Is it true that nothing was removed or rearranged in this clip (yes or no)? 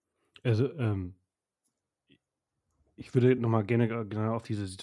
yes